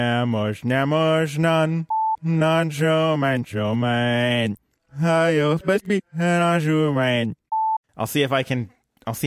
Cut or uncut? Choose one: cut